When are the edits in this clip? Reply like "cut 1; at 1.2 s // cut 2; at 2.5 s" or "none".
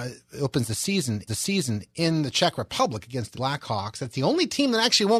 cut 1; at 1.3 s // cut 2; at 3.3 s